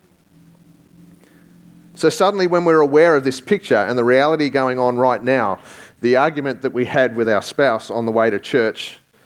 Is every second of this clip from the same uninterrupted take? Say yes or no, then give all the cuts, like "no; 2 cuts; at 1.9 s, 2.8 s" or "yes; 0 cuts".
yes; 0 cuts